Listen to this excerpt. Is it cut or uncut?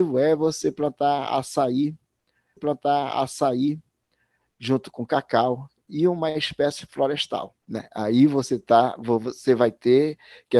cut